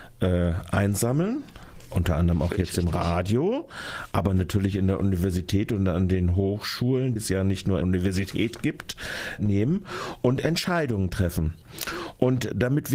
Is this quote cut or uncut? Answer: cut